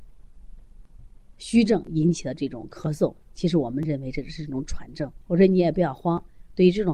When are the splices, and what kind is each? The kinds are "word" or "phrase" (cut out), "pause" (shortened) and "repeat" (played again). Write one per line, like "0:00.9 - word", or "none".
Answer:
0:05.2 - pause